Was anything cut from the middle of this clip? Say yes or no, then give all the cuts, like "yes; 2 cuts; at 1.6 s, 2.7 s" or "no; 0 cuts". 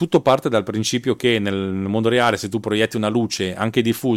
no; 0 cuts